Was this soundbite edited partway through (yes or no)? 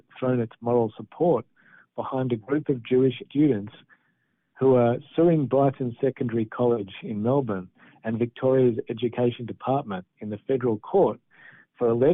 yes